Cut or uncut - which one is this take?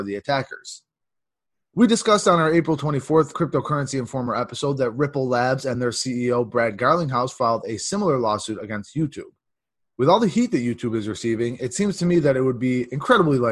uncut